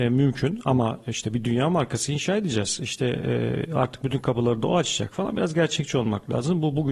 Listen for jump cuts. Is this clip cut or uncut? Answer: uncut